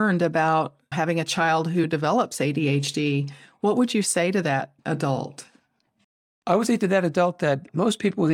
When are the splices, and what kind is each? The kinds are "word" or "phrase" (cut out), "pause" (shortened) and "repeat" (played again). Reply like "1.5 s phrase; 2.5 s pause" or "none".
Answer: none